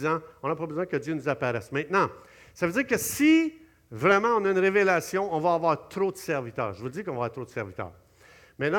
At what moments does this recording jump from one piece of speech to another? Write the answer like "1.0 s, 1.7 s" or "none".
none